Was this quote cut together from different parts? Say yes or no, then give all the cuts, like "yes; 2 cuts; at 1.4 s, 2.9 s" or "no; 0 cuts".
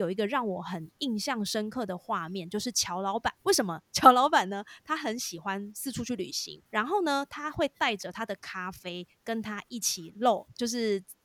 yes; 2 cuts; at 3.4 s, 6.7 s